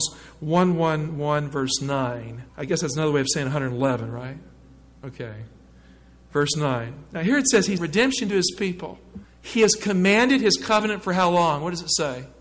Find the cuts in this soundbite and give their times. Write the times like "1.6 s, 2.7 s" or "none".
2.5 s, 7.8 s, 9.2 s